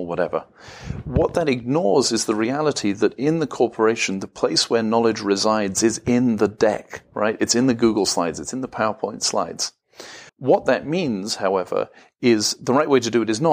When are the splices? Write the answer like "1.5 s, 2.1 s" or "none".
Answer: 10.3 s